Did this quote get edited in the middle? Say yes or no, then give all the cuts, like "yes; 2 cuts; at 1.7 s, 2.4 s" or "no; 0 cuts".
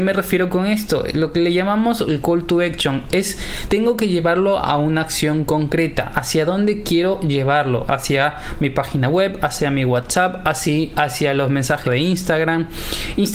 yes; 2 cuts; at 3.7 s, 11.9 s